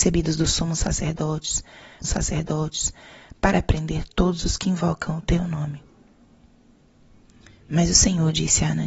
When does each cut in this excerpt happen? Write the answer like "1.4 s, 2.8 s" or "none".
2.0 s